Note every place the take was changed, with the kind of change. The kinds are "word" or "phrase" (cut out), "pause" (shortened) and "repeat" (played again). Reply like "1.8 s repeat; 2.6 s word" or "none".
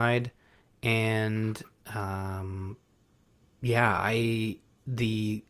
none